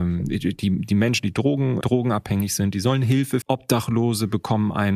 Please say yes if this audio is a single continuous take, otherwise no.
no